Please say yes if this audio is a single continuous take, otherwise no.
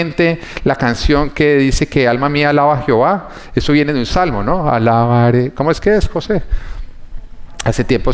yes